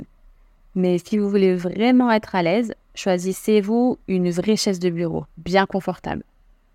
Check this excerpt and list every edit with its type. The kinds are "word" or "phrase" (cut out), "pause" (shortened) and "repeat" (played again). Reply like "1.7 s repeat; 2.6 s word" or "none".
4.0 s pause